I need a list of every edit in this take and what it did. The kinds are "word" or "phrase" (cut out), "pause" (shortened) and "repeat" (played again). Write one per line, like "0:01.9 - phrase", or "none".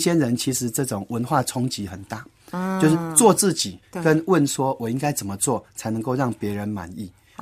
0:03.8 - pause